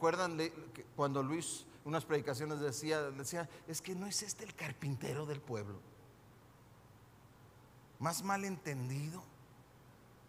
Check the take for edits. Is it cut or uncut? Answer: uncut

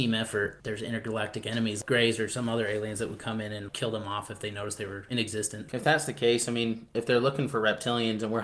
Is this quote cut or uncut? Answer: uncut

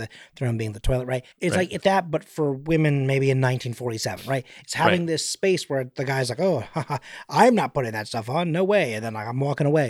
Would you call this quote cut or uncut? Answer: cut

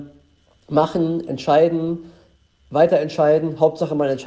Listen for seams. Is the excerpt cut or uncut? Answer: uncut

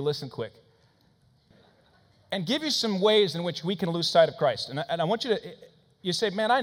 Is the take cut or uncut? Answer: uncut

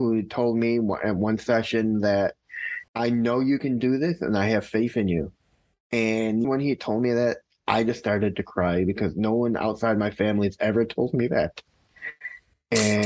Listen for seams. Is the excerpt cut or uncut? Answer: cut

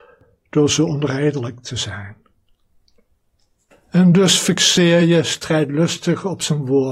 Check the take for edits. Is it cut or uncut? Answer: uncut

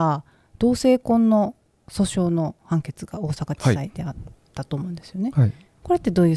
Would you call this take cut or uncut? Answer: uncut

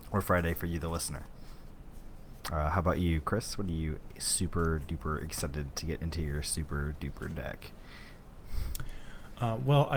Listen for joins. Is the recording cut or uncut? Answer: uncut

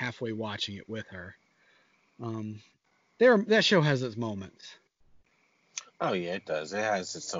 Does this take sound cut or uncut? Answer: uncut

